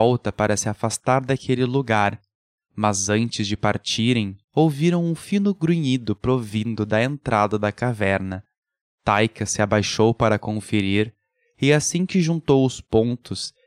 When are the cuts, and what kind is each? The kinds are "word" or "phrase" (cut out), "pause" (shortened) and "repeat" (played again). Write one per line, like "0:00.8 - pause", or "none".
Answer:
0:04.4 - pause

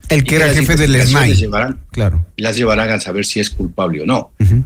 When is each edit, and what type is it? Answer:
0:02.6 - word

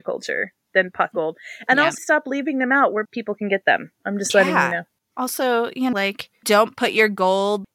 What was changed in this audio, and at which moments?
0:01.1 - word
0:02.0 - word
0:03.1 - word
0:03.9 - pause
0:05.9 - word
0:06.4 - word

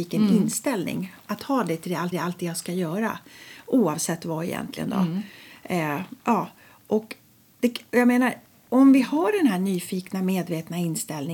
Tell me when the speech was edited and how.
0:02.1 - repeat

